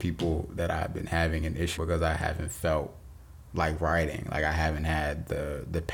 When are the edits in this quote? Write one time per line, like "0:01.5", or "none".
0:01.8